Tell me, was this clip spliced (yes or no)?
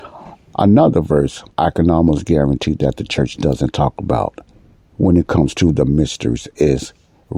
yes